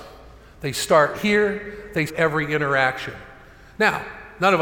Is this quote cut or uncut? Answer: cut